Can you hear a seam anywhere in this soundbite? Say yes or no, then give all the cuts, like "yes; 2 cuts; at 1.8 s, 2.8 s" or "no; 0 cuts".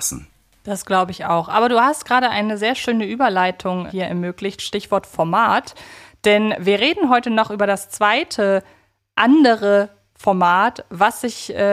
yes; 1 cut; at 3.9 s